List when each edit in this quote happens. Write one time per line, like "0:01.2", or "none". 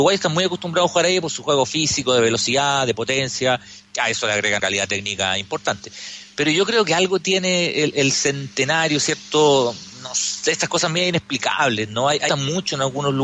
0:04.6
0:12.3